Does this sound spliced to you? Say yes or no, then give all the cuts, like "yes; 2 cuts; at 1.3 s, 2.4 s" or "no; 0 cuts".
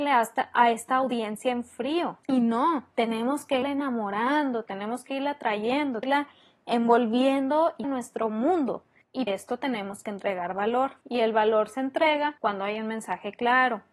yes; 8 cuts; at 2.2 s, 2.9 s, 3.6 s, 6.0 s, 7.8 s, 9.3 s, 11.0 s, 12.4 s